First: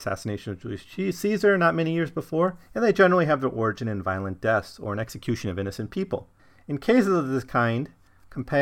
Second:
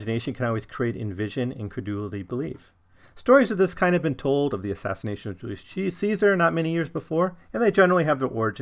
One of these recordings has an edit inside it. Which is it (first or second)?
first